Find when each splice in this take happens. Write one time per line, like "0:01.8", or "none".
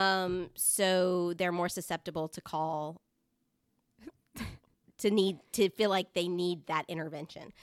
none